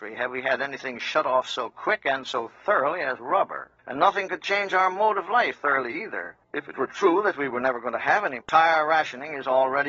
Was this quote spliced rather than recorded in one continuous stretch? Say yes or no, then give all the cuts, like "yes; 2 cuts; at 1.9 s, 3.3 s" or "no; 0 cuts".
yes; 4 cuts; at 3.8 s, 5.5 s, 6.4 s, 8.4 s